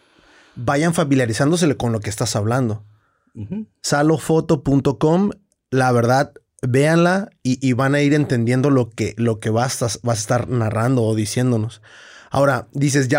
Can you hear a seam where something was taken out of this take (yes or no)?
no